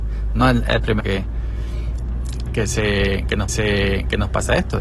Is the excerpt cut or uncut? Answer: cut